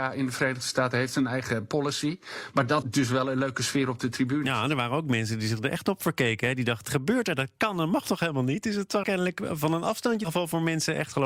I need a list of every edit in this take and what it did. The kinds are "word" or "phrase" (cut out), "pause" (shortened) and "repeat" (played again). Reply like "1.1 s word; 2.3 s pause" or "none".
2.8 s word; 6.8 s word; 9.0 s word; 10.2 s word